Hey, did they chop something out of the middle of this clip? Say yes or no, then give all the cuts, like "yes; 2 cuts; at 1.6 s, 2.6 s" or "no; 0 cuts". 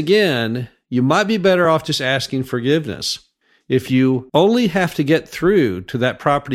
no; 0 cuts